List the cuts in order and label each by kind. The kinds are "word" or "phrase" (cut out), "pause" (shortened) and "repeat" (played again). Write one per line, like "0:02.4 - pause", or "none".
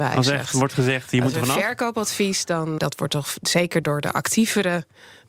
0:02.8 - word
0:03.8 - word